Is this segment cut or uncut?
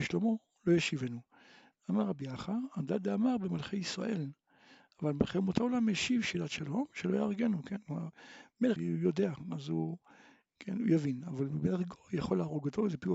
cut